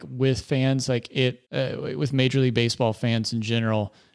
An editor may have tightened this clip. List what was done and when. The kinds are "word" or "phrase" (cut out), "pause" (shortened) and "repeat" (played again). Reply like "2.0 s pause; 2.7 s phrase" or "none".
1.4 s pause